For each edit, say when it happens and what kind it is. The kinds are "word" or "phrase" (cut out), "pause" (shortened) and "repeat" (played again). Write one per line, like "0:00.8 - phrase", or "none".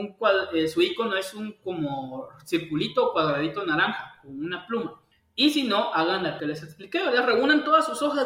0:05.1 - pause
0:06.4 - word

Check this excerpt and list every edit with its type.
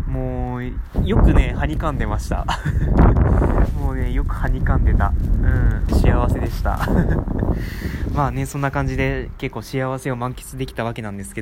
0:05.9 - phrase

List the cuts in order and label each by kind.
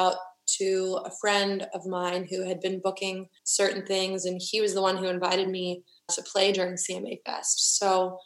0:03.4 - pause
0:06.1 - word

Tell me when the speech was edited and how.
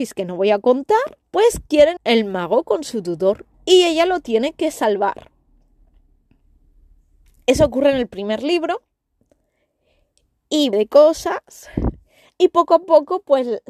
0:01.3 - pause
0:02.0 - phrase
0:03.5 - pause
0:10.7 - phrase

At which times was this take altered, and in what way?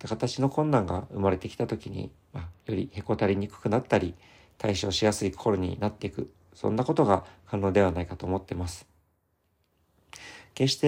none

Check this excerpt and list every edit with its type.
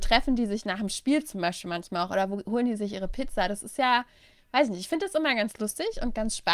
none

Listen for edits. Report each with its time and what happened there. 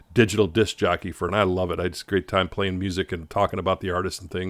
0:01.3 - word

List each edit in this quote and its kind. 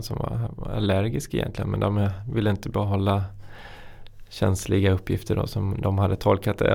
none

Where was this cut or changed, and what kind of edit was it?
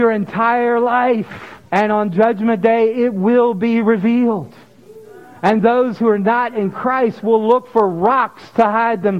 0:01.7 - pause

